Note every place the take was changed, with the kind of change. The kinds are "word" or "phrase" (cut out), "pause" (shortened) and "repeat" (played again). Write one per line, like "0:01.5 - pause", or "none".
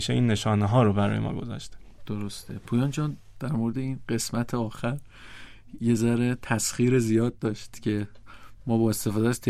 none